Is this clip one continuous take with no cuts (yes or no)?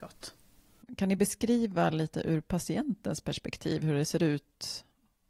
yes